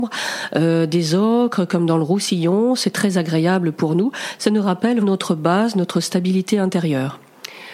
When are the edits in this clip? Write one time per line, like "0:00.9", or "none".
0:05.0